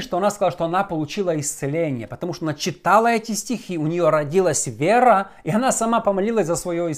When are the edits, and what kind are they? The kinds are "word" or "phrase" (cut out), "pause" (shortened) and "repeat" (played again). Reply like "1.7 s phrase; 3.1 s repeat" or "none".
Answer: none